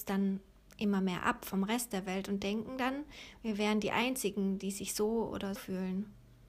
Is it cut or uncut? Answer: cut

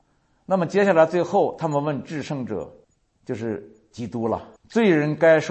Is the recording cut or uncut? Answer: cut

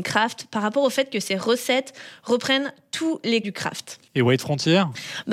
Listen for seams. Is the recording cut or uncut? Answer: cut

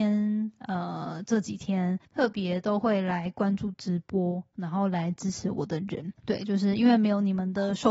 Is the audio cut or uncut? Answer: cut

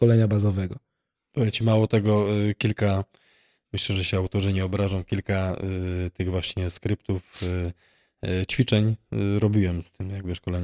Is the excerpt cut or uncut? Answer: uncut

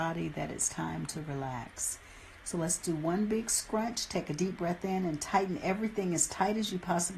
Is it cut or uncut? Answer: uncut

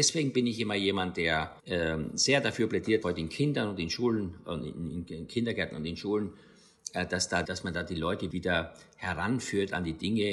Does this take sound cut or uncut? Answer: cut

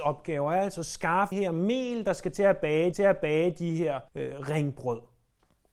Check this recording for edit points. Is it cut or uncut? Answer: cut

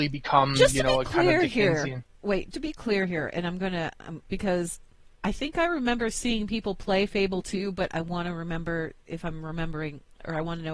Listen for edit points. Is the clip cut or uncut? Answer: cut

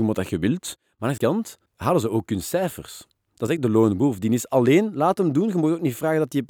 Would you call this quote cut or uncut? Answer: cut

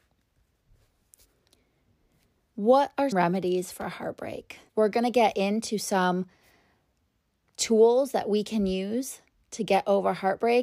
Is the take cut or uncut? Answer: cut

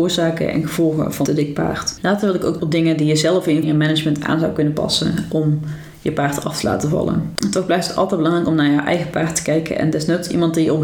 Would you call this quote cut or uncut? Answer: cut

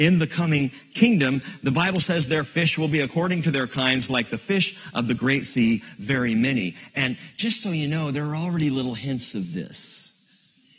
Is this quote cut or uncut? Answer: uncut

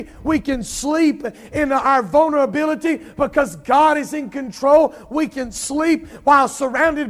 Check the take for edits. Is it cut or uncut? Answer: uncut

